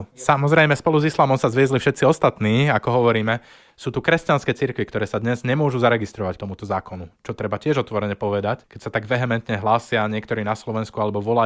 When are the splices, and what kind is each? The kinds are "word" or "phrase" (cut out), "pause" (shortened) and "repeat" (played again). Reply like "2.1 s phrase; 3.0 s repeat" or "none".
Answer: 6.4 s word